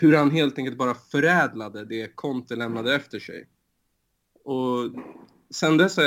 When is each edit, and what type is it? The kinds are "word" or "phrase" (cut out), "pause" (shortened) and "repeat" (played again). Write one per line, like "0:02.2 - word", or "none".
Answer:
none